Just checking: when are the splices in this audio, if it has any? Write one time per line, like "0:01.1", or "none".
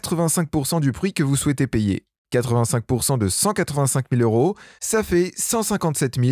none